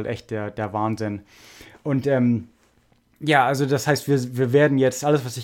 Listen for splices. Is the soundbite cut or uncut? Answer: uncut